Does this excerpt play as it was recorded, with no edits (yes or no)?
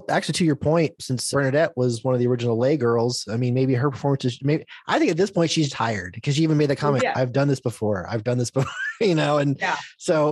no